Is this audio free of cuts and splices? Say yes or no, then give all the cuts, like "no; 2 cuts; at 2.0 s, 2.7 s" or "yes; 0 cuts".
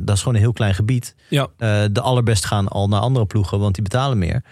no; 1 cut; at 2.4 s